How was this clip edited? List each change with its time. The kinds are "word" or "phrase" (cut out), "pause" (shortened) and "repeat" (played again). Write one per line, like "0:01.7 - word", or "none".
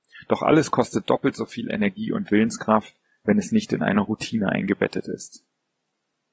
none

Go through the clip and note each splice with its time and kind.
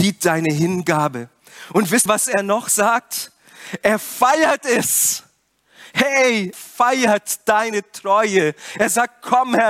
0:02.1 - word
0:06.5 - word

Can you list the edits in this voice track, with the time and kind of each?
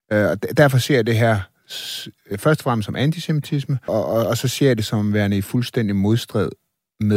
0:03.9 - word

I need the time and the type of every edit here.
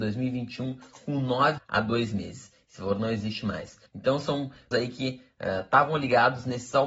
0:01.6 - phrase
0:03.9 - pause
0:04.7 - word

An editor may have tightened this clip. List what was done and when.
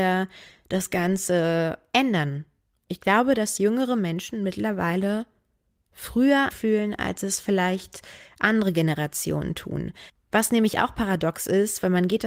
0:03.6 - word
0:06.5 - word

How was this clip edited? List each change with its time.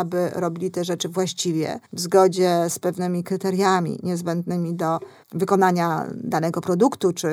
0:01.8 - pause
0:05.2 - pause

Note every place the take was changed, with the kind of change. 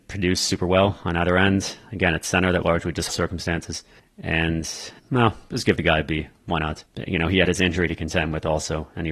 0:02.6 - word
0:03.1 - word
0:05.0 - pause
0:06.9 - pause

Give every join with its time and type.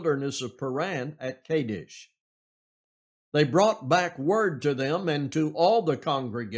none

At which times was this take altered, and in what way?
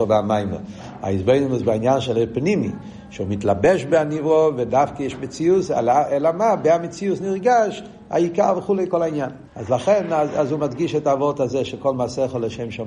0:09.5 - pause

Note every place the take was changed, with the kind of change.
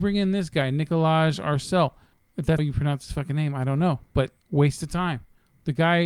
0:02.6 - word
0:04.4 - pause

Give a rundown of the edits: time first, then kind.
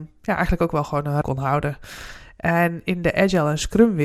0:01.2 - word

